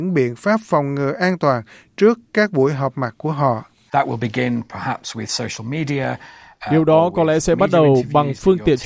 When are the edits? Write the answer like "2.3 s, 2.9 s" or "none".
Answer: none